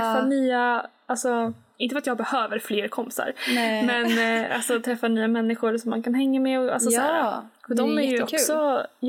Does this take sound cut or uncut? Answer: uncut